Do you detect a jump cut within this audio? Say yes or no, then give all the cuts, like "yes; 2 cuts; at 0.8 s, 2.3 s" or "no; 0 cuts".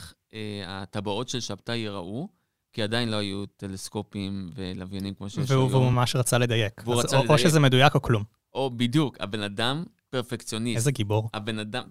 no; 0 cuts